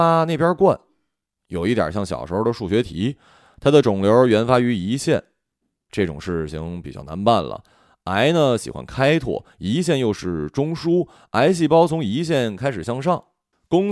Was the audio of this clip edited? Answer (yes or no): yes